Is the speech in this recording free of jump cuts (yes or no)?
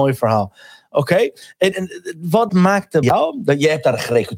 no